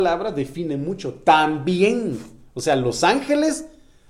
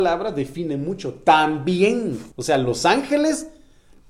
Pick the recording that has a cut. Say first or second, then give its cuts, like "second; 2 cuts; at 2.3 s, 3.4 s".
second; 1 cut; at 2.3 s